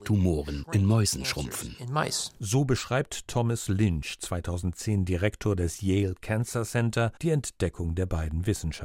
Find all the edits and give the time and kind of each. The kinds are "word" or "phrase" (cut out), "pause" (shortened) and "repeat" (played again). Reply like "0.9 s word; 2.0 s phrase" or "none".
7.2 s pause